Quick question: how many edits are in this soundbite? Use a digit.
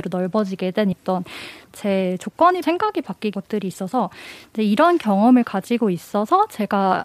3